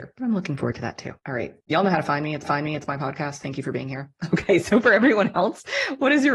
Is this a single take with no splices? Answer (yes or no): no